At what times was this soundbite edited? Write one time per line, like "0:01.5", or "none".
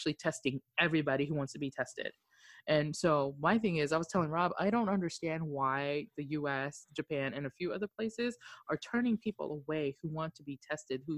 none